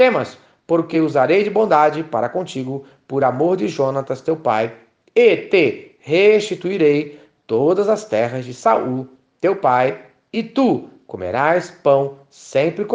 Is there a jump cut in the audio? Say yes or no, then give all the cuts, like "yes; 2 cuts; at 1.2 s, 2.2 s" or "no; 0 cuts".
no; 0 cuts